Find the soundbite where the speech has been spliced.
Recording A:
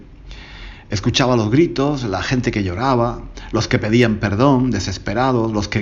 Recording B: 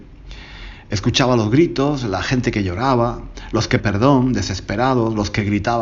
B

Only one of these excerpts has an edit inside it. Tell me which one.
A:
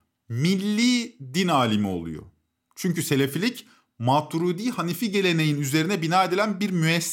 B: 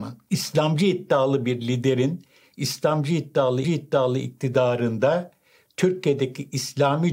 B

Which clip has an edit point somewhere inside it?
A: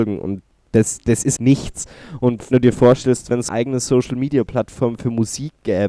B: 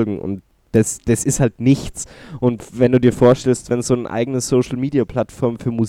A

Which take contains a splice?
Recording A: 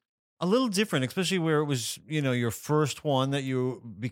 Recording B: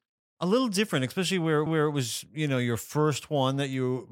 B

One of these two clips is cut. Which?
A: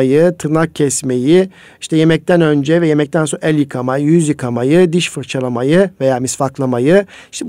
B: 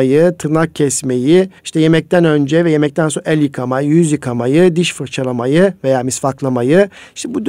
B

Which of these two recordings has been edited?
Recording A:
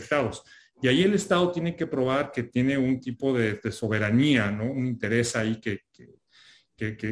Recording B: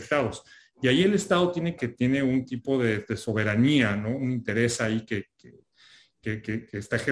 B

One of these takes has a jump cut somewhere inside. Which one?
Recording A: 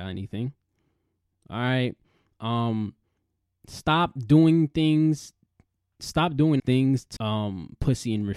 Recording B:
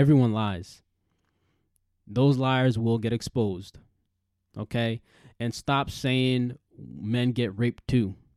A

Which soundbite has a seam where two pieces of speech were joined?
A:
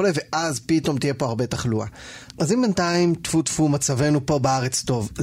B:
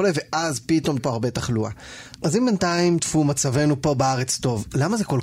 B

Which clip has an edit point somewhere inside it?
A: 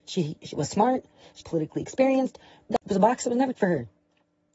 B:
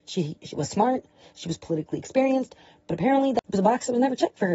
A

